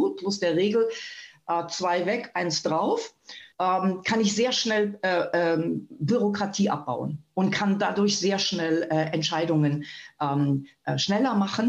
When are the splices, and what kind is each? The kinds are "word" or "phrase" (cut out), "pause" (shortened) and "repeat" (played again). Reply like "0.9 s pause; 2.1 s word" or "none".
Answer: 3.5 s pause